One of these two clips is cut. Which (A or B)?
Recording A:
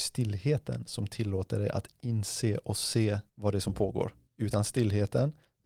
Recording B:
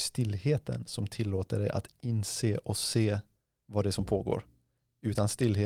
A